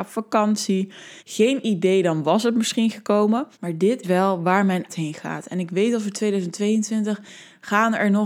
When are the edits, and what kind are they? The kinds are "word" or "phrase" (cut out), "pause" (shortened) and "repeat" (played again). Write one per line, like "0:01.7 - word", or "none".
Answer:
0:01.2 - pause
0:03.5 - pause
0:04.0 - word
0:04.9 - word